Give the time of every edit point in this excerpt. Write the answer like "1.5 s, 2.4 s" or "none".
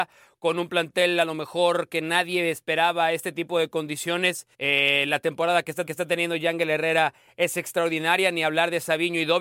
4.5 s, 5.9 s